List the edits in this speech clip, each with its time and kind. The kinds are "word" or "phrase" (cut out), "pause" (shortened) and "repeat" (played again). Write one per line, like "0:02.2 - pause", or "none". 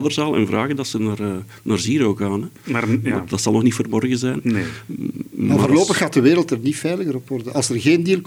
none